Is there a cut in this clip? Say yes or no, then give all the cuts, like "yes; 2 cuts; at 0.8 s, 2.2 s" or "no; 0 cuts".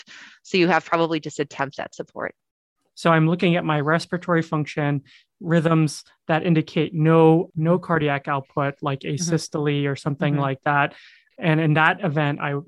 no; 0 cuts